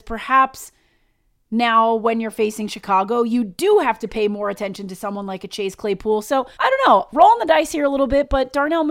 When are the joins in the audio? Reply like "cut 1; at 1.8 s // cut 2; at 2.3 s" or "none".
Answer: cut 1; at 6.5 s